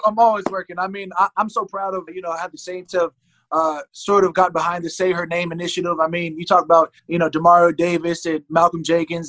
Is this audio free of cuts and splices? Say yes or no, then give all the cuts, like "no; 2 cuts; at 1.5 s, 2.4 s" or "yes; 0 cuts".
no; 2 cuts; at 2.1 s, 7.0 s